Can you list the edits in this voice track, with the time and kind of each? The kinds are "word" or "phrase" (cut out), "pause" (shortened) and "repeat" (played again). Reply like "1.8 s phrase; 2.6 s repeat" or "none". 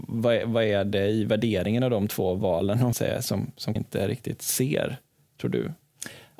2.9 s phrase; 3.8 s word